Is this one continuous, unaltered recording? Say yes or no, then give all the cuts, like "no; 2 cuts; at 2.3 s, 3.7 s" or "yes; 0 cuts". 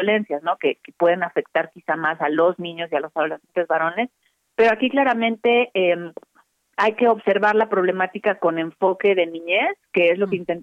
yes; 0 cuts